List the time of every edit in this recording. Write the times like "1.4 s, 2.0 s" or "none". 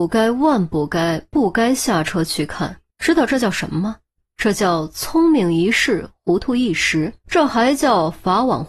2.9 s, 4.1 s, 7.2 s